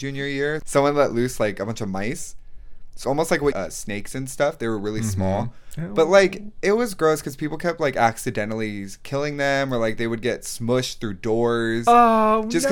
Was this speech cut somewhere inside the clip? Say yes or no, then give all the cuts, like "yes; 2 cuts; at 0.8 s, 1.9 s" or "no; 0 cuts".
yes; 2 cuts; at 3.0 s, 3.5 s